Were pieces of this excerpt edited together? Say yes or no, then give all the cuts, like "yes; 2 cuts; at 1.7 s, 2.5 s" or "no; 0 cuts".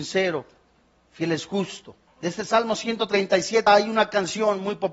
yes; 2 cuts; at 2.1 s, 3.7 s